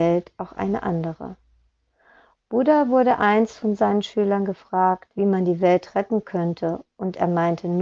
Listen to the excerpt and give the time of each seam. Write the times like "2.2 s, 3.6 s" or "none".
none